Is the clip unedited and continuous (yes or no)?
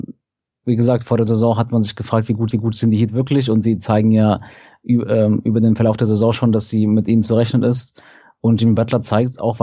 no